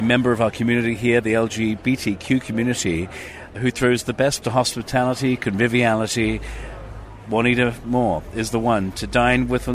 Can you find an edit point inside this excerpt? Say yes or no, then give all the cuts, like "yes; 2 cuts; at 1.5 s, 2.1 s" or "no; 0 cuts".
yes; 2 cuts; at 3.5 s, 4.4 s